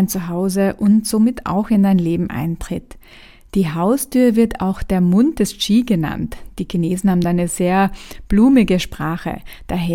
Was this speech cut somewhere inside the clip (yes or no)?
no